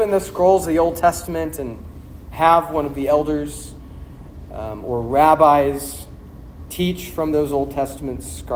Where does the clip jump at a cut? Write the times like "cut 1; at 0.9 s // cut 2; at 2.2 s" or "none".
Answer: none